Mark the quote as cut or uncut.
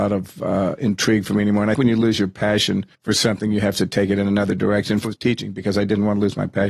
cut